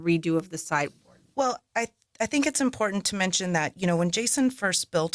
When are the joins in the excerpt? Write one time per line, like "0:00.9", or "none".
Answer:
none